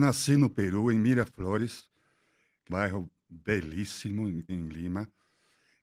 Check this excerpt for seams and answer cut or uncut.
cut